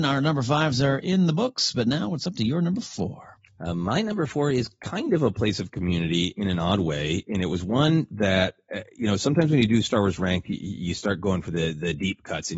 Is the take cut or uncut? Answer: uncut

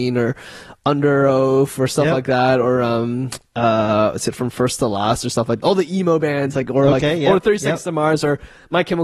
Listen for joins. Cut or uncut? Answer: uncut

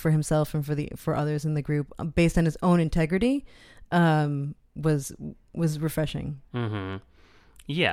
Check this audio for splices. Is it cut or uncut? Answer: uncut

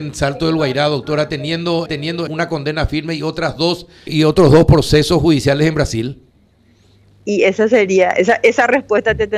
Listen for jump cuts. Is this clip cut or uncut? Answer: cut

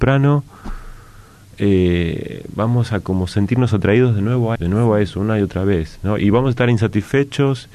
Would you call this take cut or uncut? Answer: cut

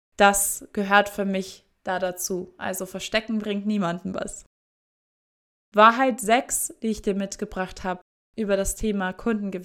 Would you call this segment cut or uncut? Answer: uncut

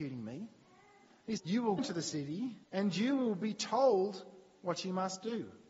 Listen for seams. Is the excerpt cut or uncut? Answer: cut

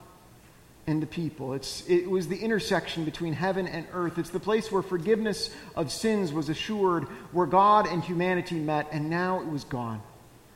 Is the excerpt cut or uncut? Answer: uncut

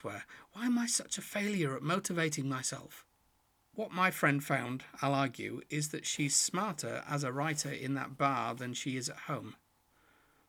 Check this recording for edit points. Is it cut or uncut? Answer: uncut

